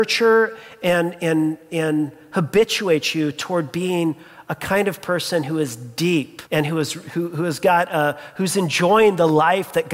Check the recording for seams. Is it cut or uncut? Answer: cut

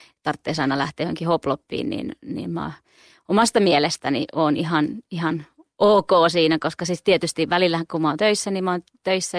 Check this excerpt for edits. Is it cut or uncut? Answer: uncut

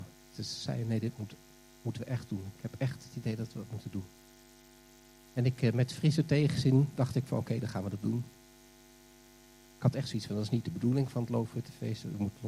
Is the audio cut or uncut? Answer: uncut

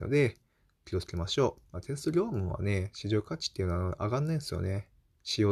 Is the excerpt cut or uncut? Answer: cut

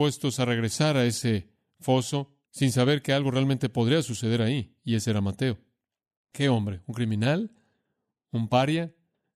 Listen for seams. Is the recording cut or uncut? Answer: cut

